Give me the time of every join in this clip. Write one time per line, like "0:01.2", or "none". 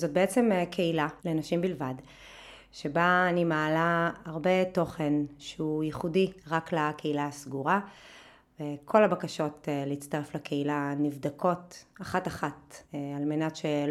0:01.2
0:06.4
0:12.8